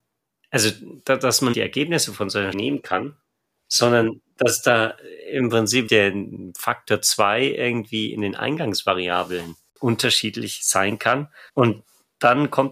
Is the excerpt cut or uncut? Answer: cut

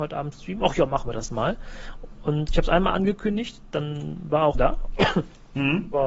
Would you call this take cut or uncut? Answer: cut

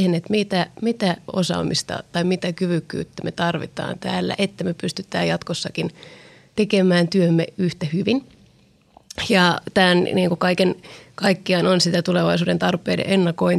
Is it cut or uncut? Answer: uncut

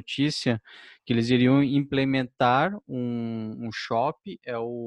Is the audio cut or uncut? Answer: uncut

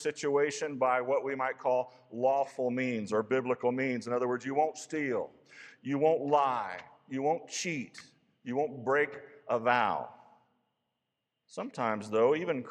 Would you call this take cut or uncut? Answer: uncut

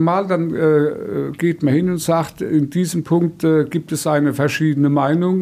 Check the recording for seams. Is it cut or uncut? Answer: uncut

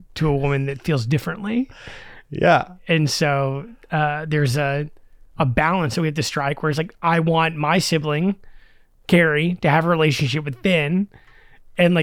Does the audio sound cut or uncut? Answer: uncut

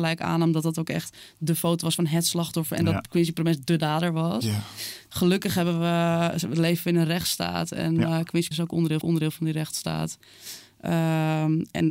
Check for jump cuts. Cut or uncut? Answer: cut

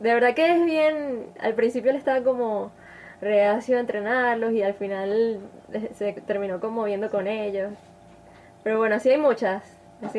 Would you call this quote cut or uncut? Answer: uncut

